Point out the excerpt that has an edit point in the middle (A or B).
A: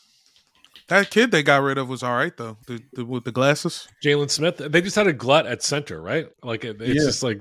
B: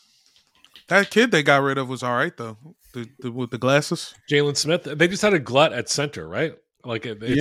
A